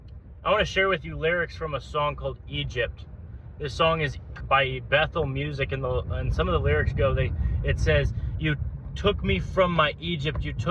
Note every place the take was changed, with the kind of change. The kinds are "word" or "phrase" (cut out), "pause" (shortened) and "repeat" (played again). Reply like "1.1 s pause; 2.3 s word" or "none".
4.4 s word